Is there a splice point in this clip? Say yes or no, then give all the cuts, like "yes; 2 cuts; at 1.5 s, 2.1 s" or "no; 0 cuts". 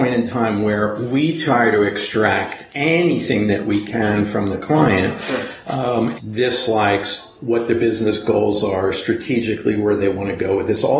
yes; 1 cut; at 6.2 s